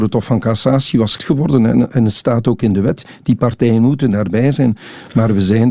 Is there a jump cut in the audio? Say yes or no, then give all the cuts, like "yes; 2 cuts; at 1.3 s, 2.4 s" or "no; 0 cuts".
yes; 1 cut; at 1.2 s